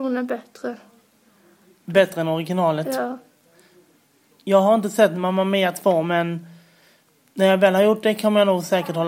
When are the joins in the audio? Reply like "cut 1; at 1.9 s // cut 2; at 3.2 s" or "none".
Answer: none